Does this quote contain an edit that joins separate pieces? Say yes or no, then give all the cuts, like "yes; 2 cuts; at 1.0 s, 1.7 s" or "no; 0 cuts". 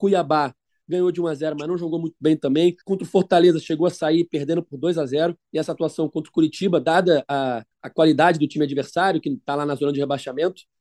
yes; 3 cuts; at 2.8 s, 5.4 s, 7.7 s